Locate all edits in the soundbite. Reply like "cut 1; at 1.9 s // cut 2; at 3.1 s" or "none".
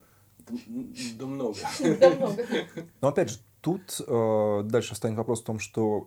none